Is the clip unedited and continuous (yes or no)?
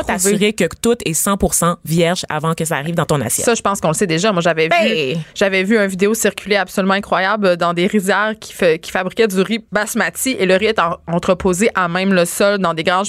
no